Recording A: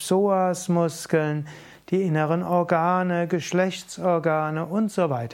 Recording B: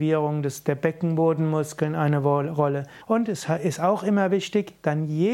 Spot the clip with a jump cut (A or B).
B